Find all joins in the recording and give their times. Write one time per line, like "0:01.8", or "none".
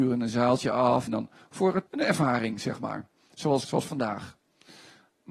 0:01.1
0:01.9
0:03.6